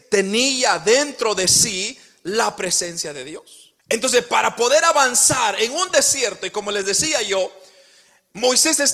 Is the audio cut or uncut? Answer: cut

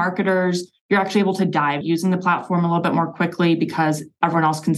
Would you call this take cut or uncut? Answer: cut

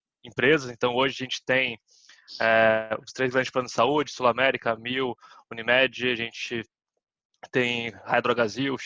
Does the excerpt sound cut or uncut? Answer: uncut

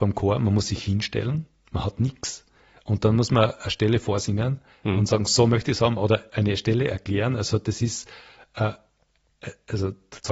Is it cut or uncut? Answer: uncut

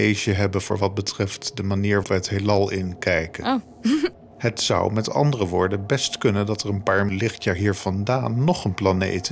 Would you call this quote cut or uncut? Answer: cut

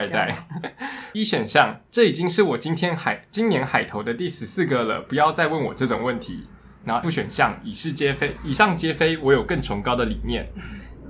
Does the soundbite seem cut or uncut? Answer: cut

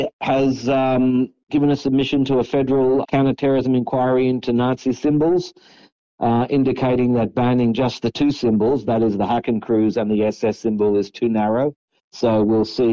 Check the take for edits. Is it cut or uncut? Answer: uncut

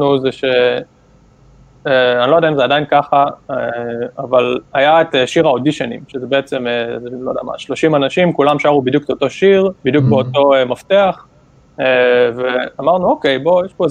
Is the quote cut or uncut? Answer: cut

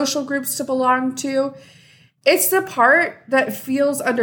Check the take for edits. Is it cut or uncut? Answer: uncut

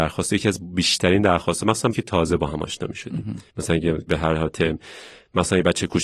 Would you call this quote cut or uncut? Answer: cut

